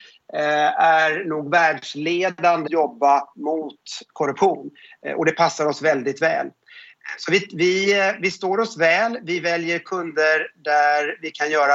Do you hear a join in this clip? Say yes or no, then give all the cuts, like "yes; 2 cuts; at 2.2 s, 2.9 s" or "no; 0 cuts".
yes; 1 cut; at 2.7 s